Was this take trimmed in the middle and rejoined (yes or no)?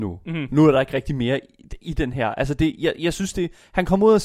no